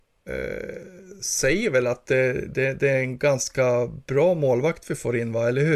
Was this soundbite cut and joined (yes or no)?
no